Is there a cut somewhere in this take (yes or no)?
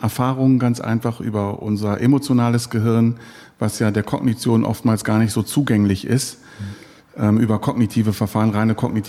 no